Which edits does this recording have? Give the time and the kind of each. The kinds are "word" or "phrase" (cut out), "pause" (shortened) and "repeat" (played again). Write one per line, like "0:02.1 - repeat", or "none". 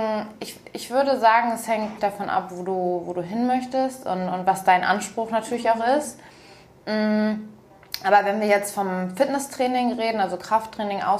0:02.0 - word